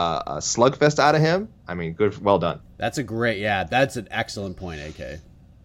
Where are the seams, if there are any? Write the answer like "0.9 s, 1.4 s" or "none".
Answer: none